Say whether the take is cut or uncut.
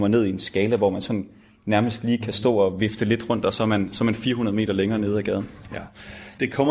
uncut